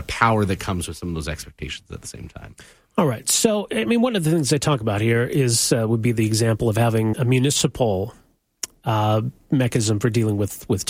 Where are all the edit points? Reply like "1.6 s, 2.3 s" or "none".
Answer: 7.1 s

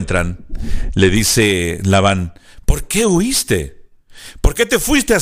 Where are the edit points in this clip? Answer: none

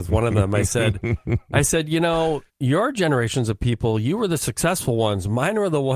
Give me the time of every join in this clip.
2.5 s

